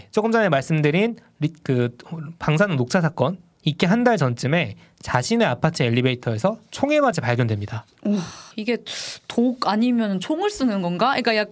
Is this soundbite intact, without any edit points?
no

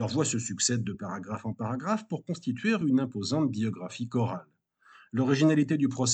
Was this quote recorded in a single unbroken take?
yes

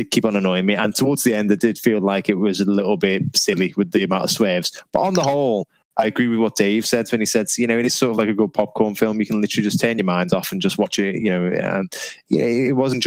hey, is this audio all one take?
yes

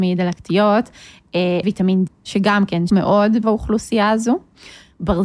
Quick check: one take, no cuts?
no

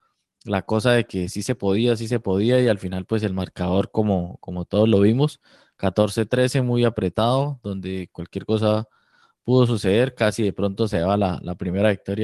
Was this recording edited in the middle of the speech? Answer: no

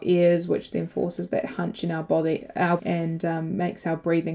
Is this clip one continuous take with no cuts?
no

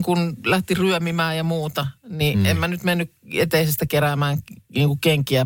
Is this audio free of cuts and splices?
yes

